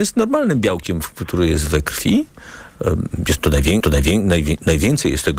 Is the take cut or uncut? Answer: cut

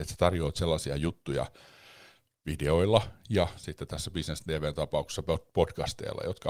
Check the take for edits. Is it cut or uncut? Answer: uncut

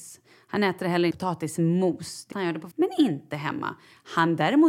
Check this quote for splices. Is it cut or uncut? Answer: cut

